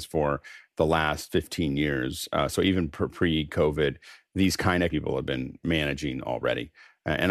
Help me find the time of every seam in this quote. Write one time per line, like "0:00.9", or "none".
0:04.9